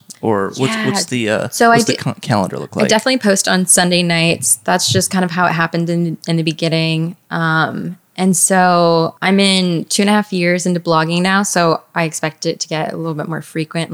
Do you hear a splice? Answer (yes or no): yes